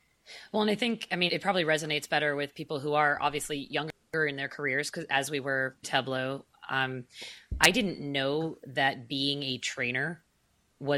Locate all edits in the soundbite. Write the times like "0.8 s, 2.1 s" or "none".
1.3 s, 5.8 s